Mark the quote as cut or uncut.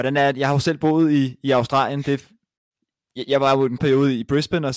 cut